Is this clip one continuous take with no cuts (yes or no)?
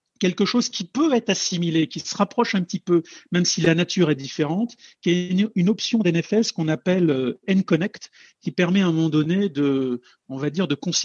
yes